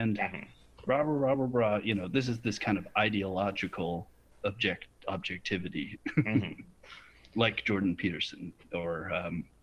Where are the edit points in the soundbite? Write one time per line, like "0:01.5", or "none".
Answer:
none